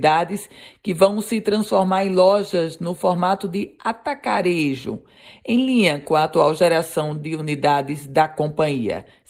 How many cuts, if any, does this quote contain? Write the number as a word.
zero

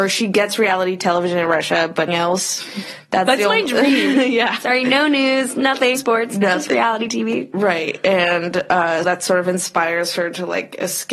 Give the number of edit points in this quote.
three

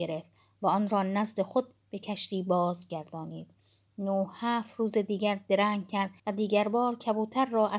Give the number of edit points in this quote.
one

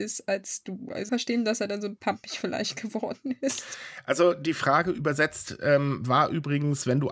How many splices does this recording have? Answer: two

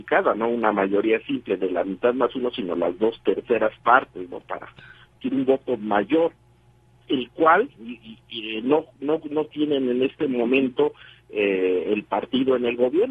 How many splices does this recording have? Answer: zero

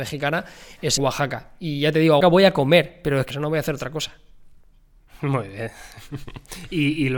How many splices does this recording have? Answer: three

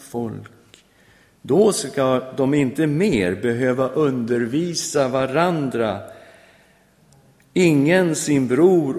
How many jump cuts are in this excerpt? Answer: zero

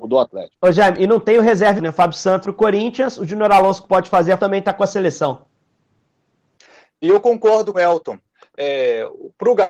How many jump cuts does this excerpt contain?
five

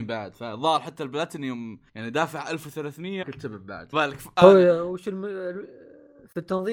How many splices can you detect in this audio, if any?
three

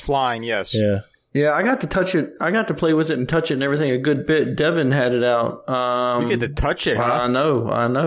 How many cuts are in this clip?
zero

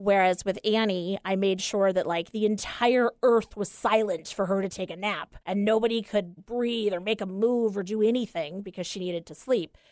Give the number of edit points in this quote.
two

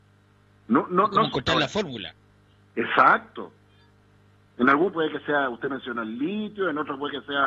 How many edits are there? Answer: one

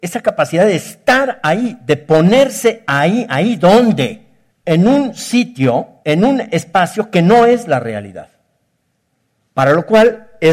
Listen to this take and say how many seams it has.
two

